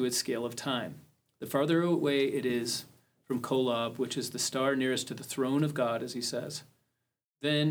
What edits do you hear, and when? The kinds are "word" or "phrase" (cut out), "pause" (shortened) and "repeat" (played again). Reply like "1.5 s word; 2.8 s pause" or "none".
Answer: none